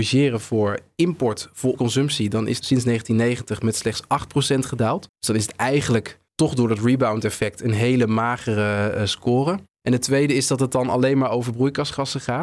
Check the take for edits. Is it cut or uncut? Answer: cut